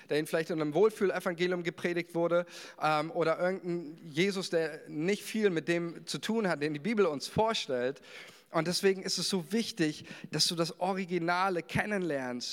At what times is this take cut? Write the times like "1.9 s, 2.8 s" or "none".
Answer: none